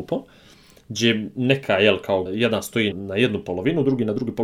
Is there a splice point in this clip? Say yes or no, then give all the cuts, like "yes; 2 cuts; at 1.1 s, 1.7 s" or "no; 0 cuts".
yes; 2 cuts; at 2.3 s, 2.9 s